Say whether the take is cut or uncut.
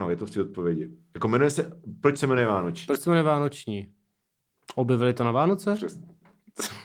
uncut